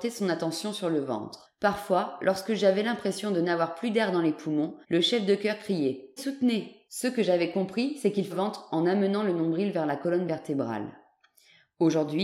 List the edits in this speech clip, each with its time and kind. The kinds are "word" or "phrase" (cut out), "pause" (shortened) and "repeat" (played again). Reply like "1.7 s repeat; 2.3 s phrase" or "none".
4.8 s pause; 6.2 s word; 6.8 s pause; 8.3 s phrase